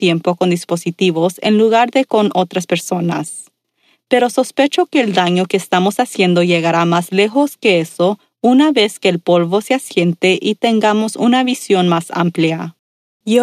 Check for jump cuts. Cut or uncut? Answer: uncut